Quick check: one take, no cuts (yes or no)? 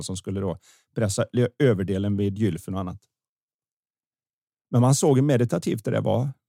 yes